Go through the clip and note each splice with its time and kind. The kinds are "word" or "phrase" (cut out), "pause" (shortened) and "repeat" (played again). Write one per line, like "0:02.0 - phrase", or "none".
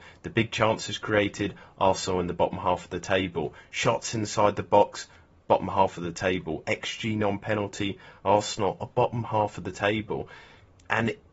none